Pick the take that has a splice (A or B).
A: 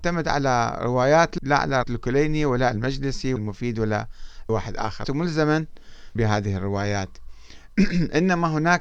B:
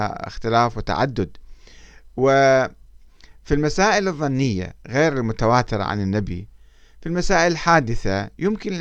A